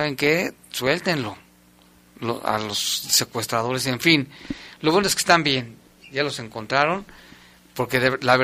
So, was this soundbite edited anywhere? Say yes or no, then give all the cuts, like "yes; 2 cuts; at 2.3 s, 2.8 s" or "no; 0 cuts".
no; 0 cuts